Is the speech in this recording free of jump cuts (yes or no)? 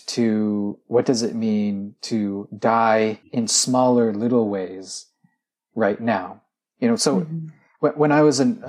yes